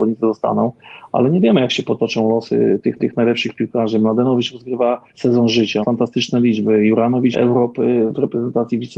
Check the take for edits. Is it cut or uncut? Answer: cut